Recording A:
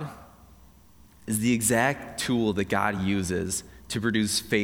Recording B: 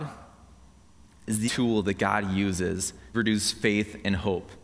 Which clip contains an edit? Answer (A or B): B